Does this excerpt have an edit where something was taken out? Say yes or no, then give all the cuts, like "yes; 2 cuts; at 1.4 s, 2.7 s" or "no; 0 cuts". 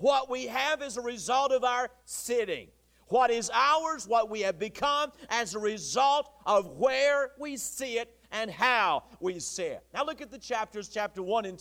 no; 0 cuts